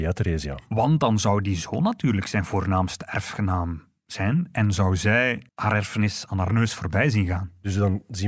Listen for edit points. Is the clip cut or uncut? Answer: cut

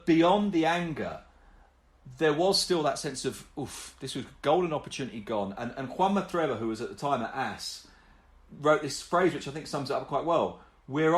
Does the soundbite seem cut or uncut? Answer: uncut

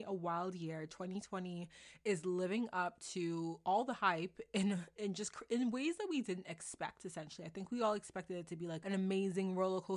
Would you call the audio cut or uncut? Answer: uncut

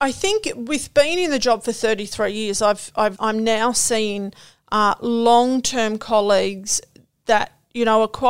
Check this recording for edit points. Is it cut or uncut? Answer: cut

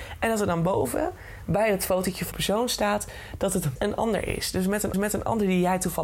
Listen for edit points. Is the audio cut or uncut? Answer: cut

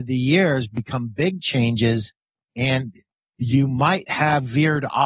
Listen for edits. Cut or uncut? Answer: uncut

